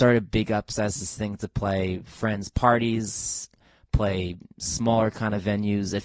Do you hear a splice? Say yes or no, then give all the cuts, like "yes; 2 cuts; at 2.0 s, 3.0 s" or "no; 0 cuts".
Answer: no; 0 cuts